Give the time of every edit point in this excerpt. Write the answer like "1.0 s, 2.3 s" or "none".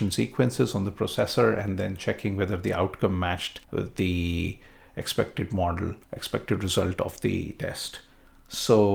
3.6 s, 6.0 s